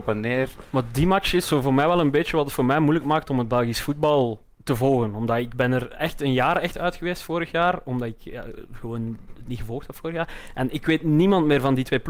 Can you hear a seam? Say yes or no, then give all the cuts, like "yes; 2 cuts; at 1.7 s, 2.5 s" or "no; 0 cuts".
yes; 1 cut; at 4.5 s